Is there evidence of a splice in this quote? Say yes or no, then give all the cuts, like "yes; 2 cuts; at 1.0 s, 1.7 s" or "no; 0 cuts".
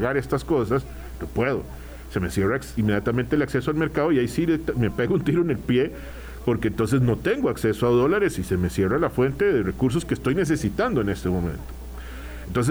no; 0 cuts